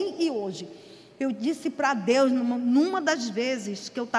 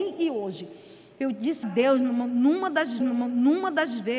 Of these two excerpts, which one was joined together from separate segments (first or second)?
second